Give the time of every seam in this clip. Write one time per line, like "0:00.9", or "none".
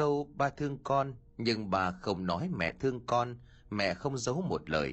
none